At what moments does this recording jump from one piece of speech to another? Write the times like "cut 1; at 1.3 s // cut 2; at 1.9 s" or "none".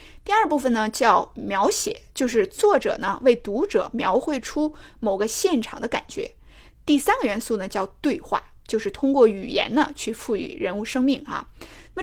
cut 1; at 2.1 s